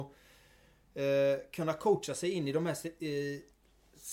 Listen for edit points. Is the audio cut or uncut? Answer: uncut